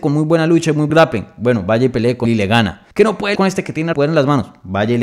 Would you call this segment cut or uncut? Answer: cut